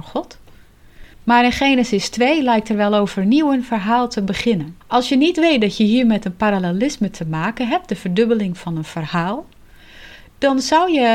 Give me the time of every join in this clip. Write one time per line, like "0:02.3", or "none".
0:01.1
0:04.8